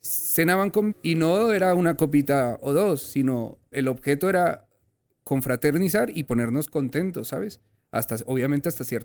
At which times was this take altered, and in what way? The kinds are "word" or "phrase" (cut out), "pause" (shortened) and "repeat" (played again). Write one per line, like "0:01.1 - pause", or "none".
0:00.9 - word
0:03.7 - word